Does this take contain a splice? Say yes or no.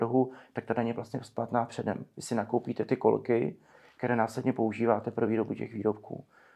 no